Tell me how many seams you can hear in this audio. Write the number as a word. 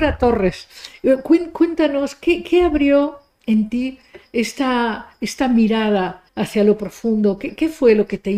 one